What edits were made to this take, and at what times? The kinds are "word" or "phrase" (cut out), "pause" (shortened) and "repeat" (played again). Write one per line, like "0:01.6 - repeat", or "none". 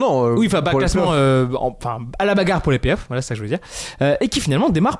none